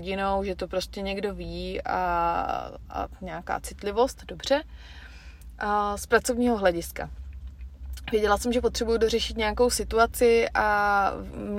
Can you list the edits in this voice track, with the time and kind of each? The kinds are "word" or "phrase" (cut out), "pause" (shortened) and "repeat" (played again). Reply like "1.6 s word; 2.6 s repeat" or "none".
none

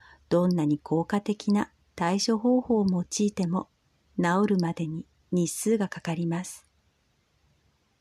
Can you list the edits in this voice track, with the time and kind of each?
none

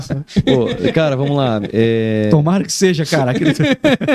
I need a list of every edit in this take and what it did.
none

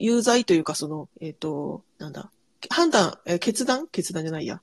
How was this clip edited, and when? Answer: 1.1 s pause; 1.9 s pause

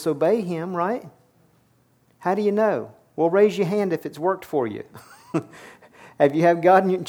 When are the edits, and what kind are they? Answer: none

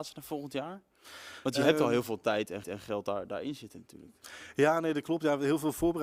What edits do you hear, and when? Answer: 2.6 s repeat

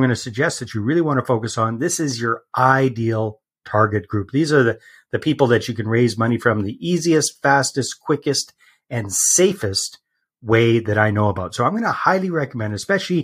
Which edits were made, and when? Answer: none

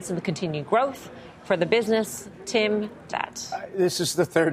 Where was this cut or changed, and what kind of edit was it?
3.1 s phrase

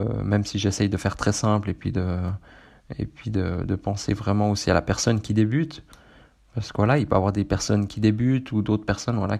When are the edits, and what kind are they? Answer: none

